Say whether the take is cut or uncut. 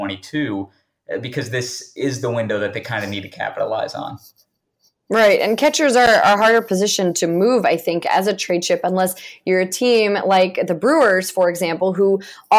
uncut